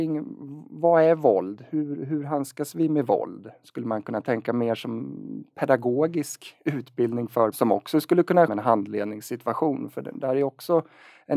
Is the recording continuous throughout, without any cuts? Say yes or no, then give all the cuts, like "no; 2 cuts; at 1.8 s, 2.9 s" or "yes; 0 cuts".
no; 2 cuts; at 7.5 s, 8.5 s